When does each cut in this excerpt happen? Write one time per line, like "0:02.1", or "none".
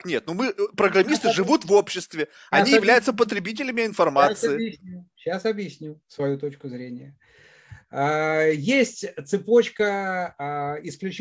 0:06.0